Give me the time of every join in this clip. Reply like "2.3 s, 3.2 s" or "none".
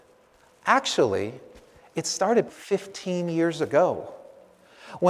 2.5 s